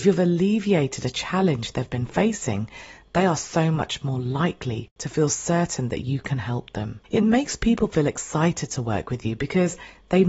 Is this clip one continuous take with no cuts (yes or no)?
no